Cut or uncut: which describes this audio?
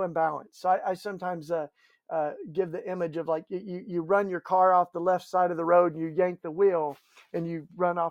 uncut